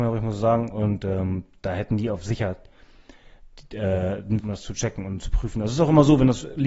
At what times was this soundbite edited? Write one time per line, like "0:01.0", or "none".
0:04.4